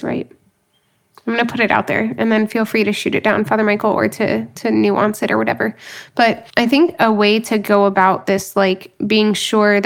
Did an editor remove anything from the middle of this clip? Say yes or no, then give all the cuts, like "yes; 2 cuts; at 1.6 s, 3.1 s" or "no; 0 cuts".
yes; 1 cut; at 6.5 s